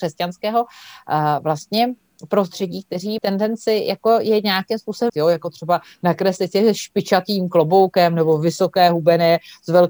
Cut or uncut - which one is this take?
cut